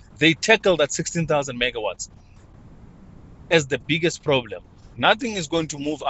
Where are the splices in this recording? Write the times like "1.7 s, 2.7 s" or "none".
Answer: none